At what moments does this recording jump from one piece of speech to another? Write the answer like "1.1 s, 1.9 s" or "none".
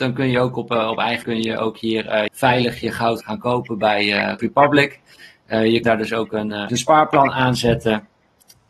1.2 s, 2.3 s, 3.2 s, 4.4 s, 5.8 s, 6.7 s